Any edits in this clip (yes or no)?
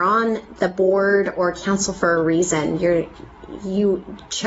no